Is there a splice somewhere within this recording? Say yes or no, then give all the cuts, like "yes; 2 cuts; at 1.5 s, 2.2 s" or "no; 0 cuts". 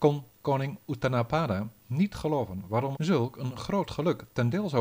yes; 1 cut; at 2.9 s